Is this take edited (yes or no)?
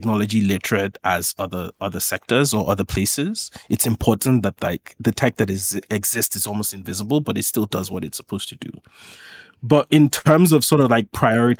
no